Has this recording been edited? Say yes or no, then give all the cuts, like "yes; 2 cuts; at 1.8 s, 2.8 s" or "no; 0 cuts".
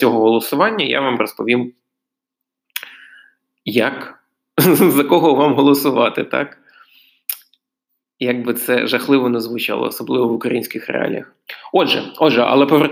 no; 0 cuts